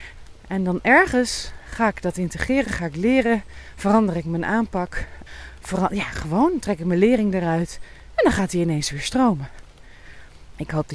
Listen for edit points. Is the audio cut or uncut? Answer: uncut